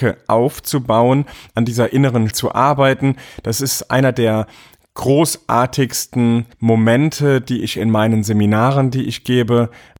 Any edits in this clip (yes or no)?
yes